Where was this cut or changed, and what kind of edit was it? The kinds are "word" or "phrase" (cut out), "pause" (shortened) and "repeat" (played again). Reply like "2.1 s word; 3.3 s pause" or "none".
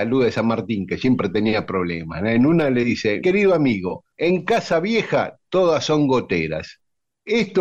3.2 s word; 4.1 s pause